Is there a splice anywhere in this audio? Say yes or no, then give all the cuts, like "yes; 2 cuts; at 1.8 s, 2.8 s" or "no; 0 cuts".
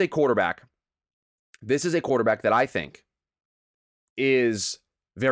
no; 0 cuts